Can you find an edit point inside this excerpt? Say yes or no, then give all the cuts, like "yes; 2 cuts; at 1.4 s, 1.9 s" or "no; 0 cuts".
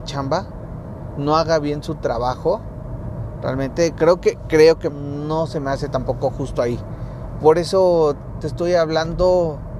yes; 1 cut; at 4.9 s